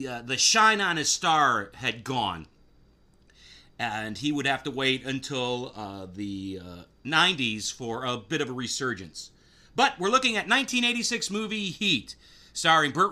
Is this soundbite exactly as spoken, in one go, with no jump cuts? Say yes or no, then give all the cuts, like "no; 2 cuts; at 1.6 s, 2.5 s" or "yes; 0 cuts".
yes; 0 cuts